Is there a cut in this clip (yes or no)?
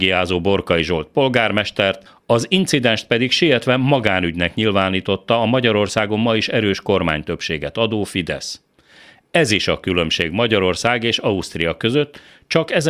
no